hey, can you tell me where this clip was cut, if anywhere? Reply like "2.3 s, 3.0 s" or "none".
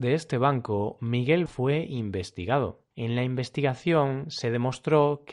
1.5 s, 2.9 s